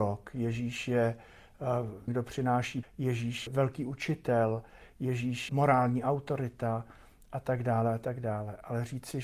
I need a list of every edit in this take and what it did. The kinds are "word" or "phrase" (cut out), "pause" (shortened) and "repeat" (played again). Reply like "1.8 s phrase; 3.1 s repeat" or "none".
2.1 s word; 2.8 s word; 3.5 s word; 5.5 s word